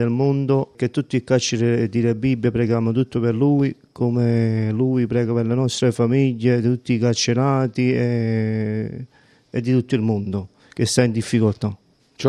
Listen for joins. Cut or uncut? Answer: uncut